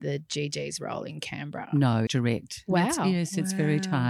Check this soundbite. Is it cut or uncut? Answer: cut